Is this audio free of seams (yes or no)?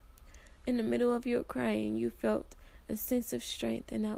yes